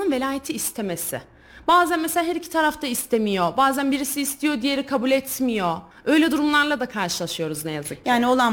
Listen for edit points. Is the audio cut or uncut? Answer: cut